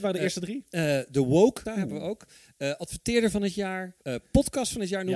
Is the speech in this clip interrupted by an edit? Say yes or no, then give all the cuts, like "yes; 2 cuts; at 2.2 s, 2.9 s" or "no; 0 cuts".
yes; 2 cuts; at 1.7 s, 4.0 s